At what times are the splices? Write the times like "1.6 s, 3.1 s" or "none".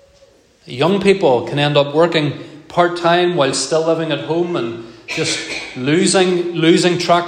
none